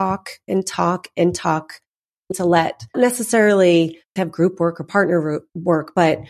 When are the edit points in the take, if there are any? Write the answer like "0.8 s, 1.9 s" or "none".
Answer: 2.3 s, 2.9 s, 4.2 s